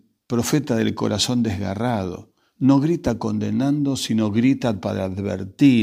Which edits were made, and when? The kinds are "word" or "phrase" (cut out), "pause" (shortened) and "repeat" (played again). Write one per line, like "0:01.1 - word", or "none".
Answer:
0:02.4 - pause